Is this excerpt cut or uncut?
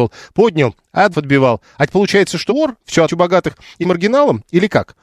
cut